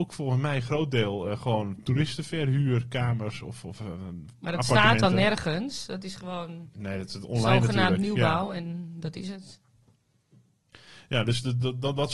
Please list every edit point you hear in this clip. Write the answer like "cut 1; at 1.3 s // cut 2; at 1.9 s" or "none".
none